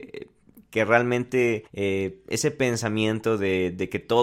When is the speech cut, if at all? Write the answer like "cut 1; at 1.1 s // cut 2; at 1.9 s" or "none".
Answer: cut 1; at 1.7 s